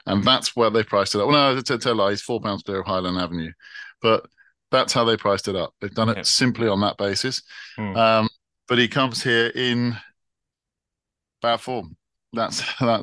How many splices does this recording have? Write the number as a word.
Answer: zero